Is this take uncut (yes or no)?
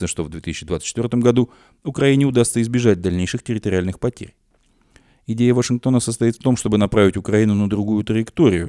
yes